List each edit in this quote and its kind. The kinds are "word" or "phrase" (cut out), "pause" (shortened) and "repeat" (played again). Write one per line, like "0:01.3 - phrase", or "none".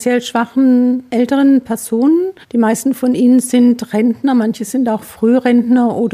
0:02.4 - pause